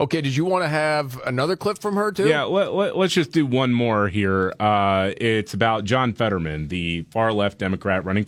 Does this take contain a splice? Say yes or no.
no